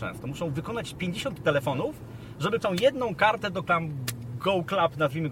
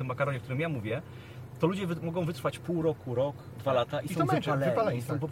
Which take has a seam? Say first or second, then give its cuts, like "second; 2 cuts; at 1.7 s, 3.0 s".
first; 3 cuts; at 1.4 s, 2.6 s, 3.7 s